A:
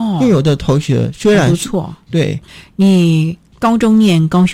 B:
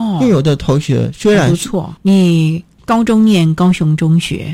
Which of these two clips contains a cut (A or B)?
B